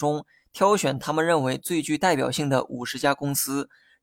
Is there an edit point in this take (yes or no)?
no